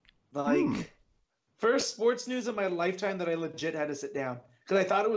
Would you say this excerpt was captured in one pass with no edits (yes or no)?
yes